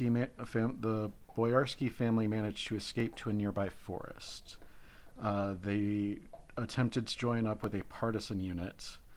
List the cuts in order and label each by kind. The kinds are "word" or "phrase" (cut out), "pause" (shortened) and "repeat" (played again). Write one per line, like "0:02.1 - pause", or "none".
none